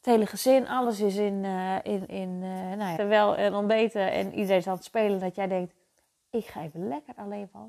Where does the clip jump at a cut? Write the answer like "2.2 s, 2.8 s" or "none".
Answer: 2.1 s, 3.0 s